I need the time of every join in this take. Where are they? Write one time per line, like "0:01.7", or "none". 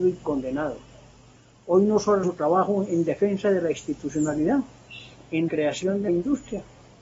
0:02.2
0:05.5
0:06.1